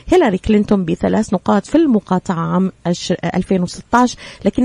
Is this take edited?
no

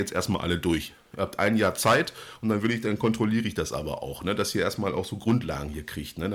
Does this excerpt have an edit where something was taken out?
no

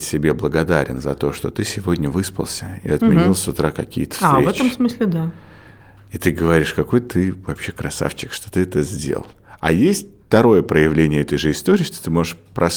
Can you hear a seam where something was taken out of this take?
no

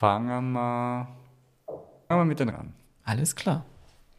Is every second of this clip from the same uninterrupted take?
no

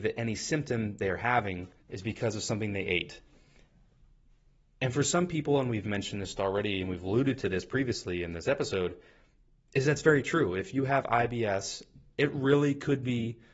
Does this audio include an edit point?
yes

